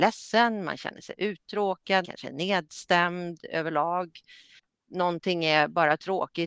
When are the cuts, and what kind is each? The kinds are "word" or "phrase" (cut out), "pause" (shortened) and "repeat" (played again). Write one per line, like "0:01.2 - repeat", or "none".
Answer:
0:02.0 - word